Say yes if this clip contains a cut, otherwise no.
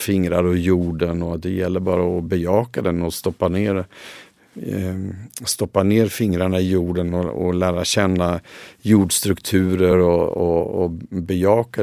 no